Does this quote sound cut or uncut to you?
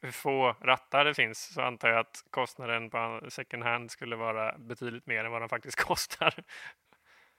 uncut